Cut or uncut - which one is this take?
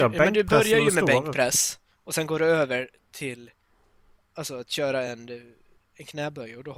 uncut